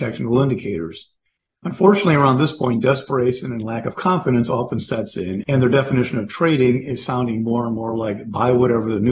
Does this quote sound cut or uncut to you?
uncut